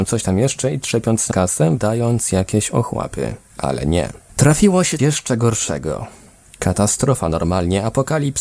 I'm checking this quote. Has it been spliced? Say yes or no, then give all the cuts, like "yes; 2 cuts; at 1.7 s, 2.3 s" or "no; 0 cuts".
yes; 3 cuts; at 1.3 s, 1.8 s, 5.0 s